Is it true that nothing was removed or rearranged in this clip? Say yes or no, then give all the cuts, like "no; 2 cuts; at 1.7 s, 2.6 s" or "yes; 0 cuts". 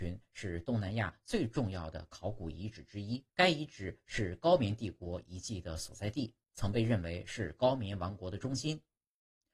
no; 2 cuts; at 3.3 s, 6.4 s